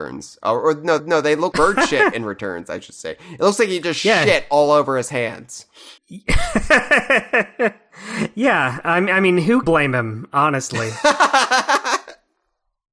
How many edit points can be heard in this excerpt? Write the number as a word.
four